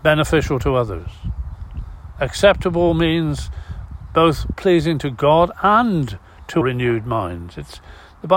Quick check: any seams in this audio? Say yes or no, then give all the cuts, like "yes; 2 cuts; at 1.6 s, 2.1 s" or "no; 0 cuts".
yes; 2 cuts; at 4.5 s, 6.6 s